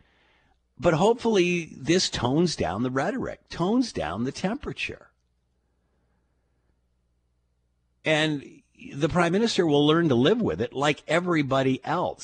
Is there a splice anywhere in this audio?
no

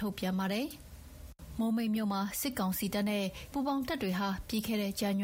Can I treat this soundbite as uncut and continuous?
no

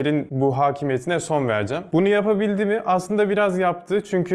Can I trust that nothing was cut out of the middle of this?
yes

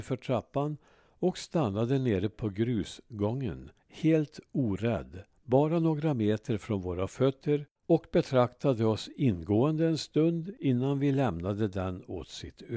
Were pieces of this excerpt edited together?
yes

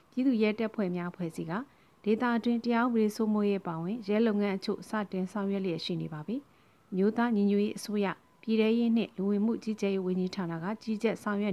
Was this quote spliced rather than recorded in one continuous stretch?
no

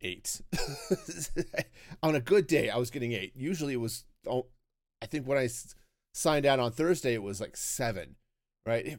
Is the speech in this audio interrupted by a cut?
no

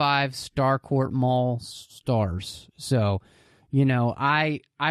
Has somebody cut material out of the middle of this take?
no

